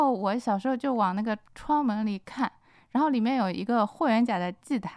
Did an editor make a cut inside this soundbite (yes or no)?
yes